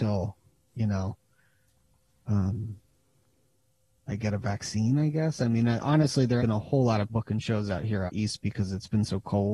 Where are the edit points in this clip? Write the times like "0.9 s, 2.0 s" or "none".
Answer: 6.4 s, 7.1 s, 8.1 s